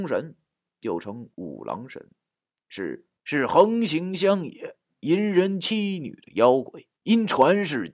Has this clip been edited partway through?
yes; 3 cuts; at 1.3 s, 3.2 s, 7.0 s

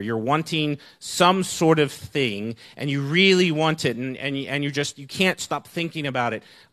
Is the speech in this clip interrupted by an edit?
no; 0 cuts

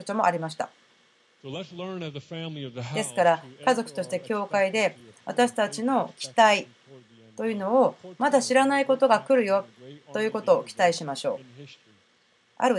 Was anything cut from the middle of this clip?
no; 0 cuts

